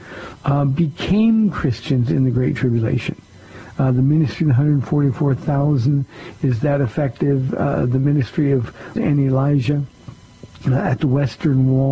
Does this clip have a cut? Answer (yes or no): yes